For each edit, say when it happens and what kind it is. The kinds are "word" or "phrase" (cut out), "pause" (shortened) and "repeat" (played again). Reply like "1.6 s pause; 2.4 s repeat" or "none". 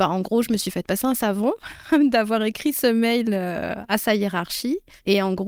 none